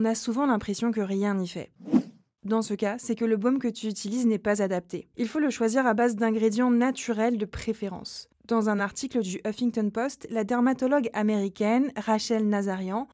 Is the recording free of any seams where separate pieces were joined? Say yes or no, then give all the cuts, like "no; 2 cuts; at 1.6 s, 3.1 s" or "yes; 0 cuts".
yes; 0 cuts